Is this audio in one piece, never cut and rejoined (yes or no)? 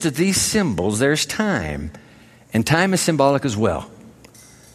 yes